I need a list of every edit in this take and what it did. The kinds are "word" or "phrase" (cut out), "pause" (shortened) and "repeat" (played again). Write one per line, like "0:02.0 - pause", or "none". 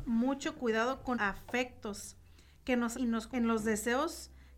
0:01.1 - word
0:02.9 - word
0:03.3 - word